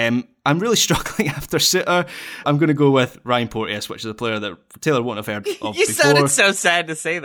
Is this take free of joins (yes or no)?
no